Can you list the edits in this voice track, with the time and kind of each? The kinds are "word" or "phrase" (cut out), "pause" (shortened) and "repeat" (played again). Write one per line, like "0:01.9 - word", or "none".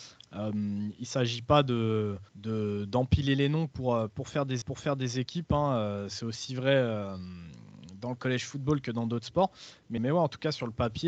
0:02.3 - pause
0:04.6 - repeat
0:10.0 - word